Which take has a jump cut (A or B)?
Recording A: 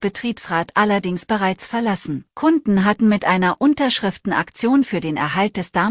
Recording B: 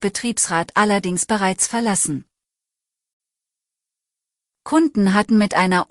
A